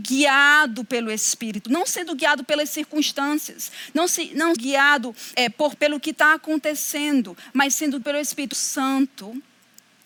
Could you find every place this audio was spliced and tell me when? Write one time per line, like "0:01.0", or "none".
0:01.6
0:04.6
0:05.4
0:05.8
0:08.0
0:08.5